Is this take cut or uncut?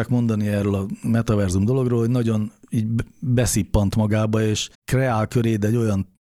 cut